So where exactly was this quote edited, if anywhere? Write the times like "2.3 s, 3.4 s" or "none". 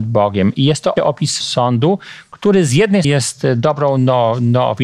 1.0 s, 1.4 s, 3.0 s